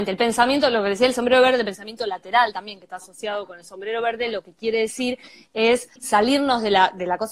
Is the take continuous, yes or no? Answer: no